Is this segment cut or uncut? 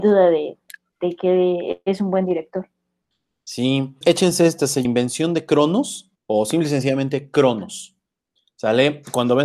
cut